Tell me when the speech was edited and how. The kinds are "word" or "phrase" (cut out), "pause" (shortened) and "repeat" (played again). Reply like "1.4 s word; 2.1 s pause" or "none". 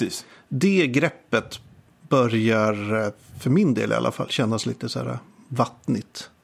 none